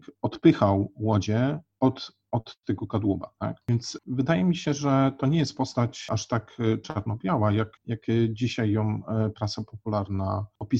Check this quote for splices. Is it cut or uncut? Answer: cut